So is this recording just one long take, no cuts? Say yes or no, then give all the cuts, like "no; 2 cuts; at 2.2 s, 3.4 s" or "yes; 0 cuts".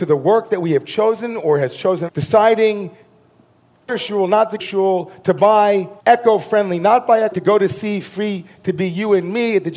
no; 5 cuts; at 2.1 s, 3.9 s, 4.6 s, 6.0 s, 7.3 s